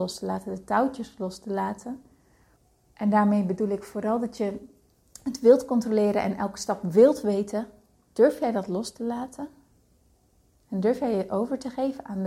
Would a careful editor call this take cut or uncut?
cut